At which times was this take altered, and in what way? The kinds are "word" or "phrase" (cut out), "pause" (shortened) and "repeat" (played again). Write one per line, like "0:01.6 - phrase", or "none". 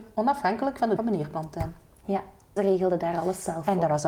0:01.0 - word
0:02.6 - word